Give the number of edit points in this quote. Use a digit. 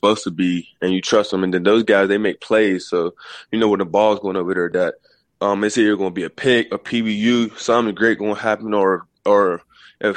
0